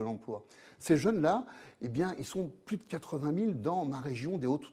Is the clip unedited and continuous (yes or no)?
yes